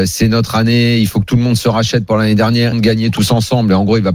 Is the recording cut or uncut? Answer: cut